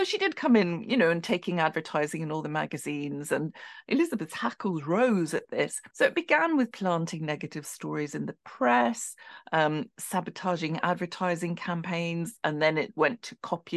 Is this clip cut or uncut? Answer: cut